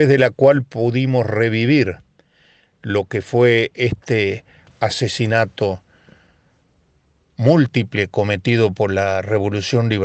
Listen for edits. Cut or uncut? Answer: uncut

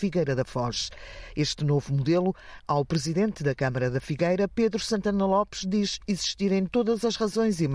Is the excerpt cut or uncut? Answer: cut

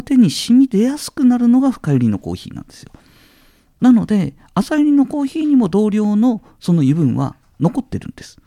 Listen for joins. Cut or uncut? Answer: uncut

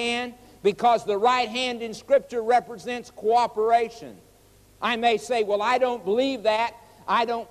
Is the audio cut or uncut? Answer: uncut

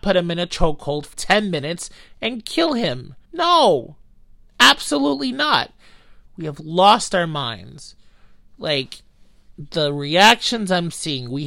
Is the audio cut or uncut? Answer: cut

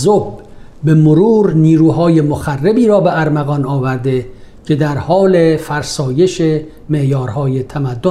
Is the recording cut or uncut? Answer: uncut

